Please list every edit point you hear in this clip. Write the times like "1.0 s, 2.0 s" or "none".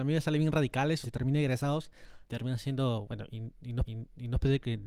1.0 s, 2.2 s, 3.8 s

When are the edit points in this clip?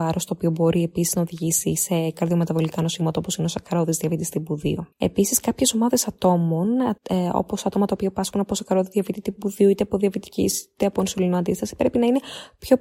4.9 s, 7.0 s

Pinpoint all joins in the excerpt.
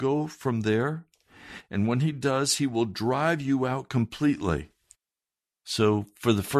none

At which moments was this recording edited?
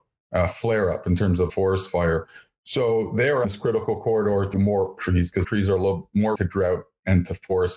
1.5 s, 3.4 s, 4.5 s, 5.0 s, 5.4 s, 6.3 s

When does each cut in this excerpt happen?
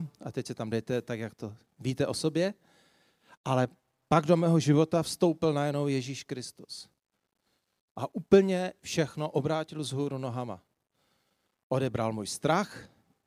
none

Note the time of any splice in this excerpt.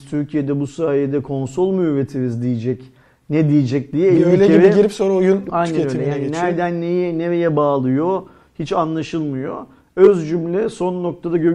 none

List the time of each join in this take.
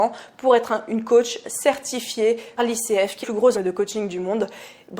2.6 s, 3.2 s, 3.5 s

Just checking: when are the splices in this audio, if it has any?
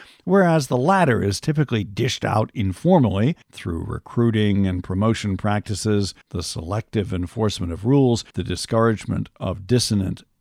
3.4 s, 6.2 s, 8.3 s

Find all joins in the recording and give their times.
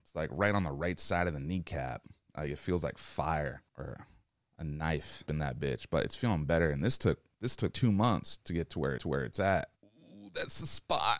3.7 s, 5.3 s, 7.7 s, 9.0 s, 9.7 s

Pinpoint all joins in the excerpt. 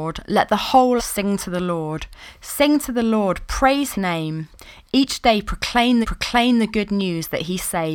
1.0 s, 3.9 s, 6.0 s

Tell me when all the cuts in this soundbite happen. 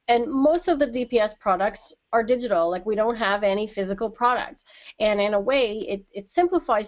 none

